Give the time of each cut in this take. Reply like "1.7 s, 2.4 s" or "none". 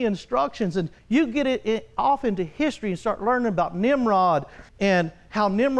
1.0 s, 4.7 s